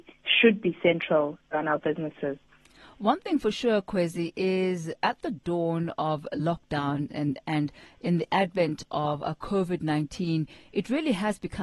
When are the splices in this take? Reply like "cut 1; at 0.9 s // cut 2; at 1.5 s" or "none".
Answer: cut 1; at 1.4 s